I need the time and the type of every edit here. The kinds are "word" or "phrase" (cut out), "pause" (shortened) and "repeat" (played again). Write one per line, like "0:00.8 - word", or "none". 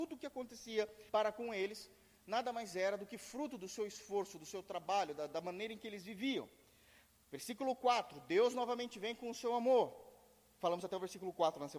0:01.1 - pause